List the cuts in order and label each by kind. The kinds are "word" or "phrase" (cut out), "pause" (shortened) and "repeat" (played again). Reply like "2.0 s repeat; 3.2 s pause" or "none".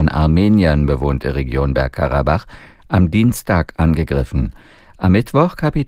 none

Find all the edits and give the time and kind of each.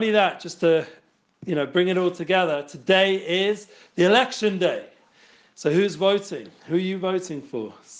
none

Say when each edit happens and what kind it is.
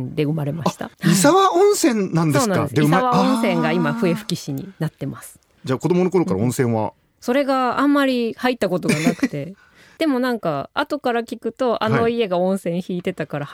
0.9 s pause

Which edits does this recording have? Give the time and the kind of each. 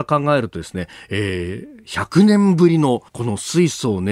3.1 s pause

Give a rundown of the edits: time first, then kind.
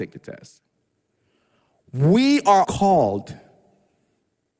2.6 s word

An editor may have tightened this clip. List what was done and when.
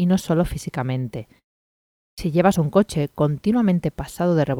none

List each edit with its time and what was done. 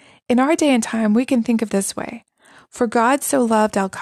1.7 s word

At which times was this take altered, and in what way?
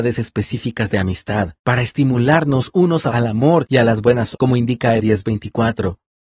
1.6 s pause; 3.1 s word; 4.3 s word; 5.0 s word

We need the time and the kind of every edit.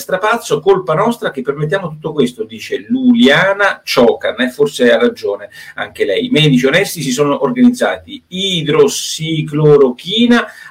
none

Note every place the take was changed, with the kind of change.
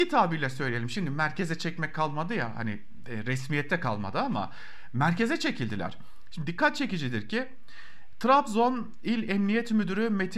none

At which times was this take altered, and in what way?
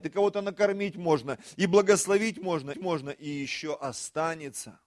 2.7 s repeat

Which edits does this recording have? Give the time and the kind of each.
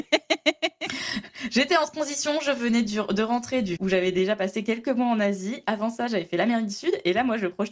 3.8 s word

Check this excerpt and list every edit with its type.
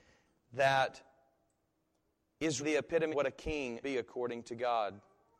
2.6 s word; 3.1 s word; 3.8 s word

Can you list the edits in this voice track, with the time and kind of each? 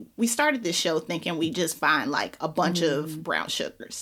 none

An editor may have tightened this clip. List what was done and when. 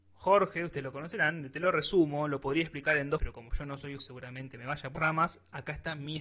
3.2 s word; 4.0 s phrase; 5.0 s word

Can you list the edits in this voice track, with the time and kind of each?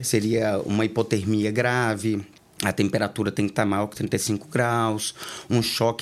2.4 s pause

